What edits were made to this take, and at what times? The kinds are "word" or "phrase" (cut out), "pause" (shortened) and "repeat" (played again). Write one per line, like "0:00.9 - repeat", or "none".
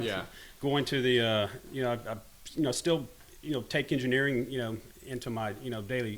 none

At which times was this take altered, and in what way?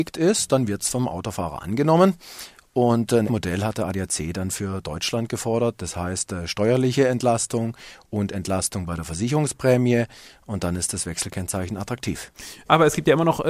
0:03.3 - word

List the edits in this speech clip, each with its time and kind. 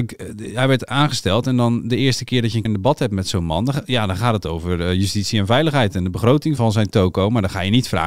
0:02.7 - word
0:06.6 - word

